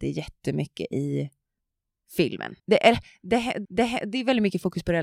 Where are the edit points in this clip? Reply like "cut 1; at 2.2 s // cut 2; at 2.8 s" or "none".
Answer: cut 1; at 2.6 s // cut 2; at 3.6 s